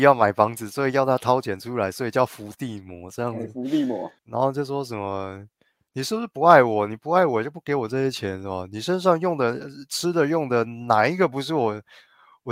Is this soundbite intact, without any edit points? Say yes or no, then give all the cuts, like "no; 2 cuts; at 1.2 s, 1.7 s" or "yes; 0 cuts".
no; 1 cut; at 4.2 s